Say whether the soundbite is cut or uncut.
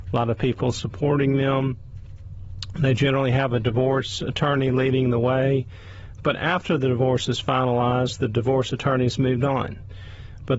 uncut